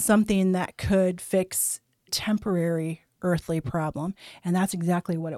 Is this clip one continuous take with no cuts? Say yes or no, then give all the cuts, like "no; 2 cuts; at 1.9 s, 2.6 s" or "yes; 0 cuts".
no; 1 cut; at 2.1 s